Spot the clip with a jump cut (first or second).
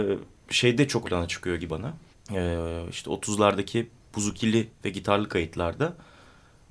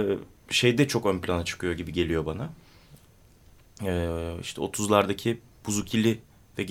first